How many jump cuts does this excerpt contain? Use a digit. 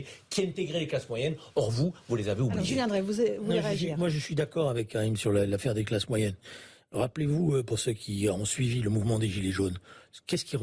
0